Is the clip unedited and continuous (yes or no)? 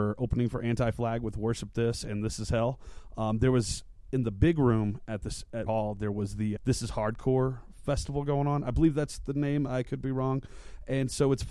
no